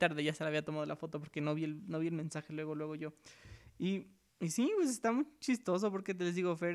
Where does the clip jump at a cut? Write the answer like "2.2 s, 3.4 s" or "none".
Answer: 4.3 s